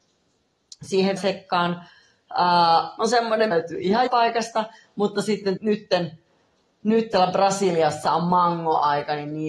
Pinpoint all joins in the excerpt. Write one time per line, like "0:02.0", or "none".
0:01.2
0:03.0
0:03.5
0:04.1
0:05.6
0:07.1